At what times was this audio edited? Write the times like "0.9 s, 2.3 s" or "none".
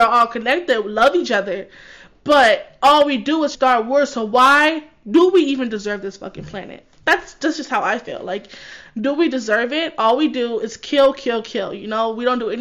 3.5 s

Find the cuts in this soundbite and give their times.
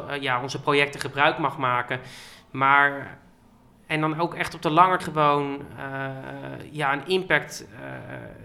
5.0 s

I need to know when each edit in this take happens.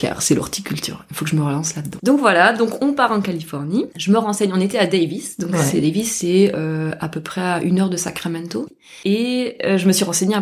none

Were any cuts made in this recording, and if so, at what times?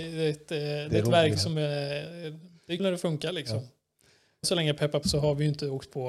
1.3 s, 2.8 s, 4.4 s, 5.0 s

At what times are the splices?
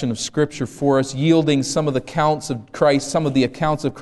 none

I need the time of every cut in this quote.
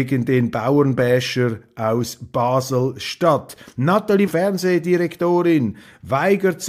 4.3 s

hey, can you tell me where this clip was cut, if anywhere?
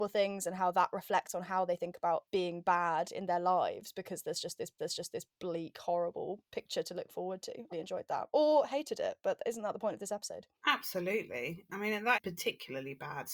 2.3 s, 4.8 s, 6.4 s, 7.7 s, 10.6 s, 12.2 s

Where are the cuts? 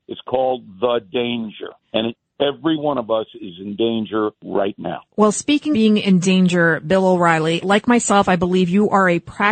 1.8 s, 4.3 s, 5.1 s, 5.7 s, 7.6 s

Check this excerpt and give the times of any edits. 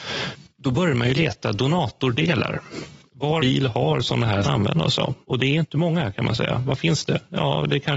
3.4 s, 4.4 s, 5.2 s

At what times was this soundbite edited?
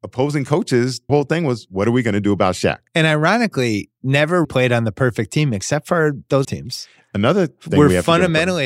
1.1 s, 2.9 s, 4.4 s, 6.4 s

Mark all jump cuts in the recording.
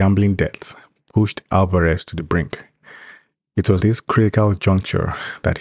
3.8 s

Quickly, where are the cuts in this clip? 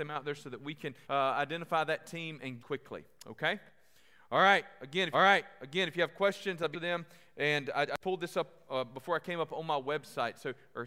1.0 s, 2.6 s, 5.1 s, 6.7 s, 8.0 s

